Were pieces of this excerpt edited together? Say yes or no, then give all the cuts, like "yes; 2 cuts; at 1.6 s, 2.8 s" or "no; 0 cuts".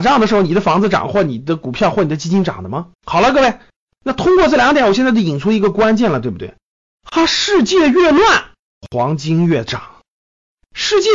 yes; 1 cut; at 2.9 s